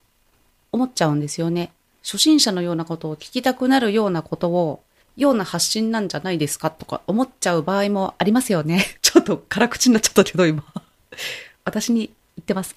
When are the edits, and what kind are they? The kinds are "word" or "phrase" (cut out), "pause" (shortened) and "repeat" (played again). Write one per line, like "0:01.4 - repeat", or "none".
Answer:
0:01.9 - pause
0:05.0 - pause
0:09.0 - pause